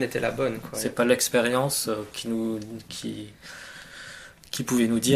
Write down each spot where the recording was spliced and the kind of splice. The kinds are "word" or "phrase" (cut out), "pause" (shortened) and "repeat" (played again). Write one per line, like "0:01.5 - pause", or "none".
0:02.1 - word